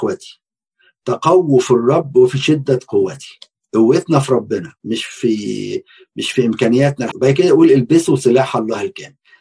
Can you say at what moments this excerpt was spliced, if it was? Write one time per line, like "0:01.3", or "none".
0:03.6
0:07.1